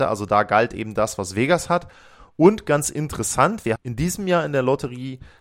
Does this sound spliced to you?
yes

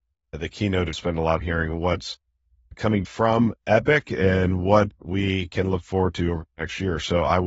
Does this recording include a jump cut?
yes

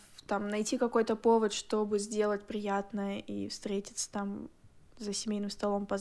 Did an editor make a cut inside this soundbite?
no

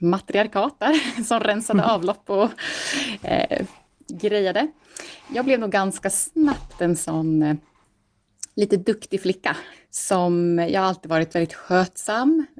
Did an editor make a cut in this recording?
no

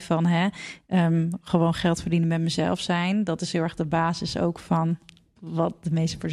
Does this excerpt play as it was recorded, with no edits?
yes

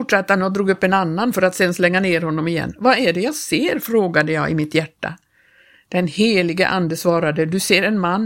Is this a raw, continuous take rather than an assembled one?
yes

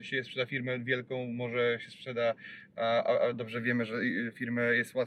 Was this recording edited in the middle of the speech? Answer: no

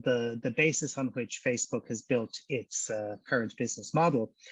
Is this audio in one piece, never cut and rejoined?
yes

